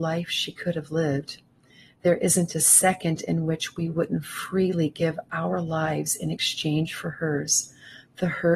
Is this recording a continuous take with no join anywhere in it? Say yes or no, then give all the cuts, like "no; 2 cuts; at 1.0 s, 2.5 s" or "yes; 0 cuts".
yes; 0 cuts